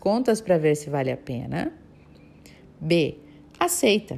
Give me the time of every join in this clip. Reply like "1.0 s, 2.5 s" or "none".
none

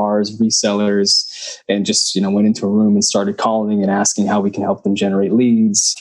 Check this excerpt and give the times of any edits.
none

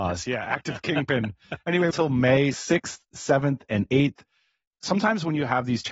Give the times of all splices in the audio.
1.9 s

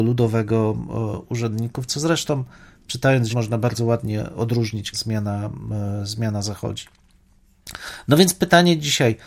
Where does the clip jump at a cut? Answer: 3.3 s, 4.9 s

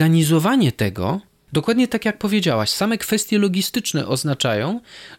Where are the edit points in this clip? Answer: none

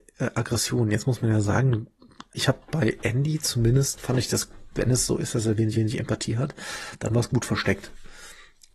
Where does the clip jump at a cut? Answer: 2.3 s, 5.7 s

